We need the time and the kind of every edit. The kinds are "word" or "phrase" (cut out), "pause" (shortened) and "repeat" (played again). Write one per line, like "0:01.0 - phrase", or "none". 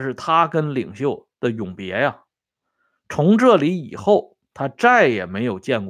0:01.3 - pause